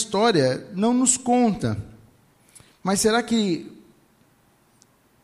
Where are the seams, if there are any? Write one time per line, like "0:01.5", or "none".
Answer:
none